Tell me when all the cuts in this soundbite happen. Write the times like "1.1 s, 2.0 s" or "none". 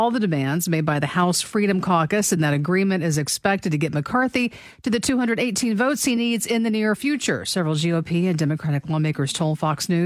none